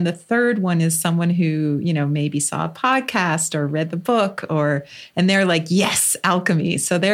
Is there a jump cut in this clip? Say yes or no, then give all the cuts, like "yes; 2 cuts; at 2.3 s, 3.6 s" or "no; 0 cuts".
no; 0 cuts